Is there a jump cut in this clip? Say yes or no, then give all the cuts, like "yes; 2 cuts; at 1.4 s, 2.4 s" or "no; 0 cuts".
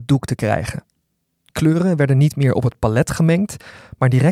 no; 0 cuts